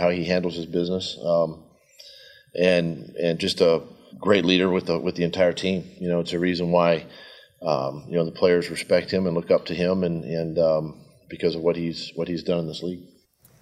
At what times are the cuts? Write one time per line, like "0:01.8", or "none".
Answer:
0:04.1